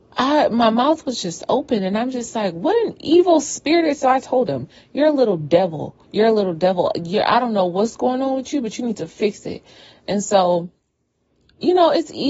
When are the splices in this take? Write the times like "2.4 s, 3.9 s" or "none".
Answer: 6.0 s